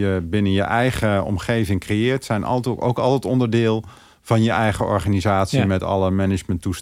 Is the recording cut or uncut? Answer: uncut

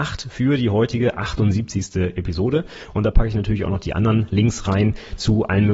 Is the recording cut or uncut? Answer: uncut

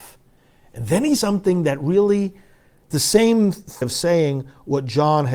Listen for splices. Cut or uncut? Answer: cut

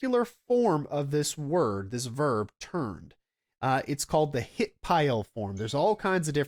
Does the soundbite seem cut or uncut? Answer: uncut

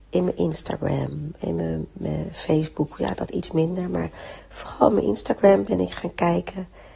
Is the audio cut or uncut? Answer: uncut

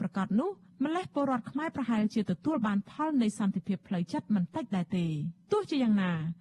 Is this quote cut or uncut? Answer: cut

